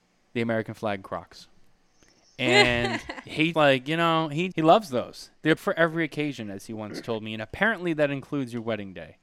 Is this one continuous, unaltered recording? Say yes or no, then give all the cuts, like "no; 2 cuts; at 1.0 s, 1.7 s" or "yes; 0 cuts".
no; 4 cuts; at 1.7 s, 3.5 s, 4.5 s, 5.6 s